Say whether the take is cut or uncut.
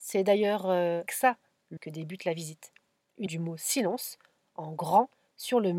cut